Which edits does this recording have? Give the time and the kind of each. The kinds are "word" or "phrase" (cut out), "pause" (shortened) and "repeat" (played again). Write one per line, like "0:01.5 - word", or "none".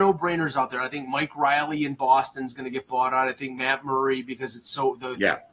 none